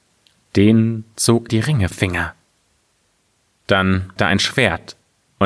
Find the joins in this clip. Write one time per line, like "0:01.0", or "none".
0:01.5
0:01.9
0:04.2